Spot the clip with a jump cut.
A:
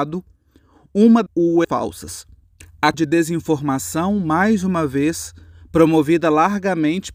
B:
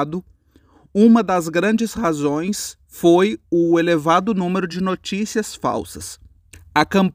A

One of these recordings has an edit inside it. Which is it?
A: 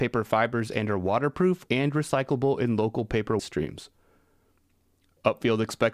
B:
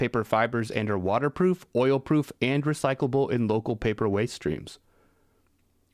A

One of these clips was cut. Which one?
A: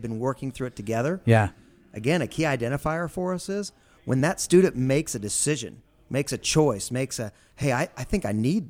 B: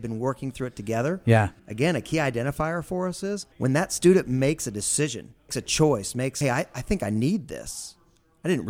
B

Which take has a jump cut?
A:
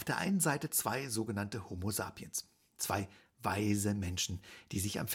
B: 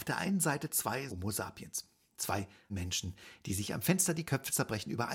B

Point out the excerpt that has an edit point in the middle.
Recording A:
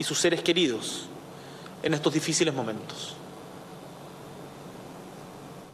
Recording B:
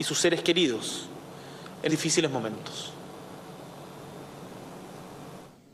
B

